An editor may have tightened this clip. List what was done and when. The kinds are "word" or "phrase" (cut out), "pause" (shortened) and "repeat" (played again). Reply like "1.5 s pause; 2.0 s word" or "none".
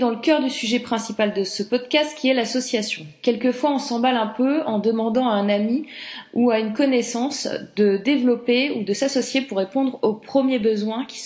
none